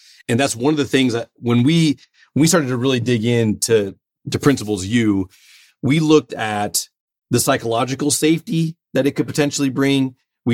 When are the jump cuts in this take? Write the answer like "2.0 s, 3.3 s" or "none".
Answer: none

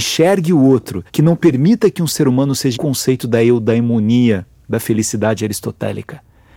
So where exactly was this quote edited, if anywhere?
1.1 s, 2.7 s

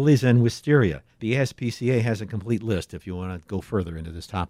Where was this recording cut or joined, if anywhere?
1.1 s

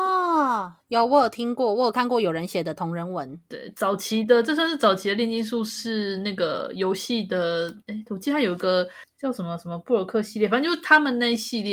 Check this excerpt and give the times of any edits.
7.8 s

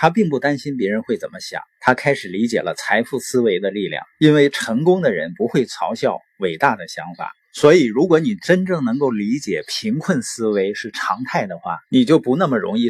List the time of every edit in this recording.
1.7 s, 4.1 s, 7.4 s, 11.8 s

